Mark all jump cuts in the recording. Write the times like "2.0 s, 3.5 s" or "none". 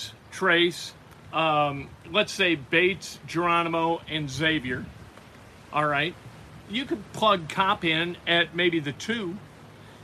none